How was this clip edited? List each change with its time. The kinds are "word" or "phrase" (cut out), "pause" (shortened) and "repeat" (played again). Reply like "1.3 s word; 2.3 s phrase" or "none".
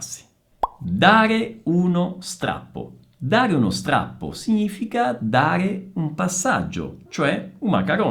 7.1 s pause